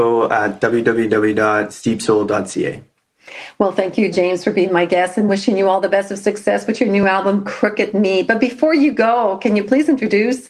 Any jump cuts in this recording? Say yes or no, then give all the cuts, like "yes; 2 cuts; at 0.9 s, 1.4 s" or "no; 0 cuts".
no; 0 cuts